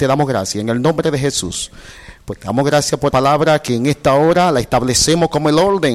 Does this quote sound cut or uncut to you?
cut